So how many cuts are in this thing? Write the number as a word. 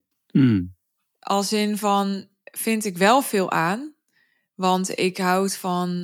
zero